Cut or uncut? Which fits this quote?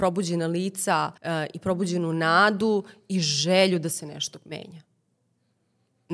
cut